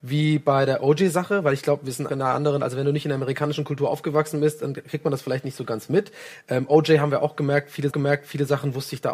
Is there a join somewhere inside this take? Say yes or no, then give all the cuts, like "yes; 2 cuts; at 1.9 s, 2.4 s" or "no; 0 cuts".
yes; 2 cuts; at 2.1 s, 7.9 s